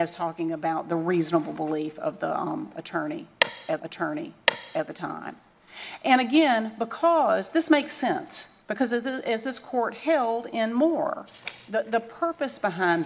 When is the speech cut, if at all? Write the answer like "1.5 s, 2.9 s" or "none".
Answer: 3.8 s, 8.6 s